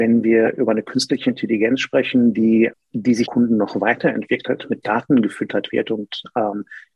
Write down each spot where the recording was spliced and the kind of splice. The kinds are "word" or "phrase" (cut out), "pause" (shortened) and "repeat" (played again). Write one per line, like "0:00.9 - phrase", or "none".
0:02.7 - word
0:03.3 - phrase
0:04.8 - word